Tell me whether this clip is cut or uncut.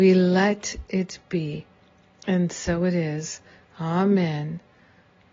uncut